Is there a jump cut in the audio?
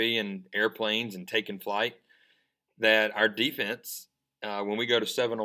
no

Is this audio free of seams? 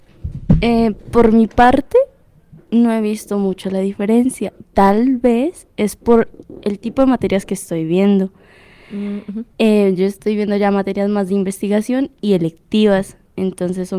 no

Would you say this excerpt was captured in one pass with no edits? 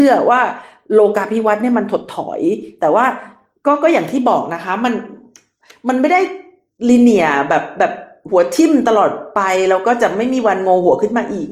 yes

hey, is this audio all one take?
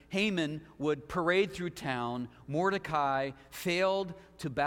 yes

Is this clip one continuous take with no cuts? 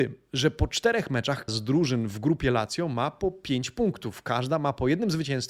no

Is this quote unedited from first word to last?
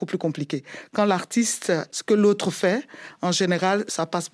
no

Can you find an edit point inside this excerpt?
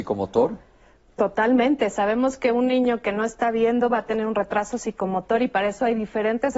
no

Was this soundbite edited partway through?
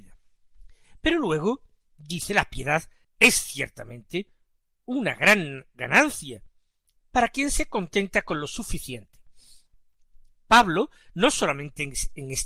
yes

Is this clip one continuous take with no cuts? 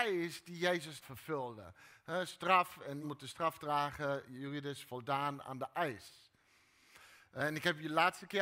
no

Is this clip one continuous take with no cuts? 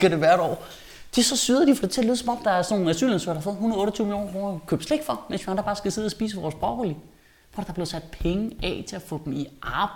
yes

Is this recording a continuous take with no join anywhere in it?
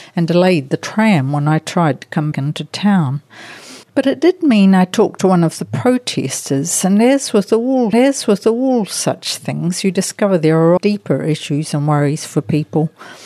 no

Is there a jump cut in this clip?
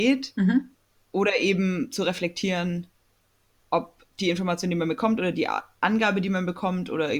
no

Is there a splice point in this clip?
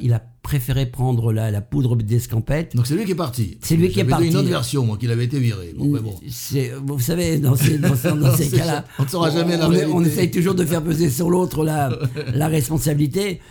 no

